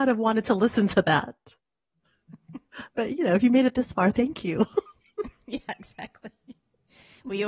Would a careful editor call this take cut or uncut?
uncut